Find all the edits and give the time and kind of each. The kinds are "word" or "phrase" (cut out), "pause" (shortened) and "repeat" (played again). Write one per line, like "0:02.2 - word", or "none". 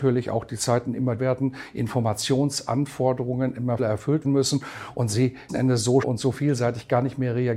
0:01.2 - word
0:03.8 - word
0:04.2 - word
0:05.5 - word
0:06.0 - word